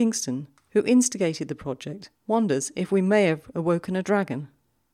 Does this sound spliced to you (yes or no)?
yes